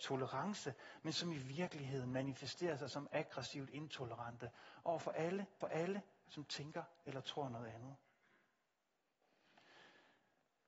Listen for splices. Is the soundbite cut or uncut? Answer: cut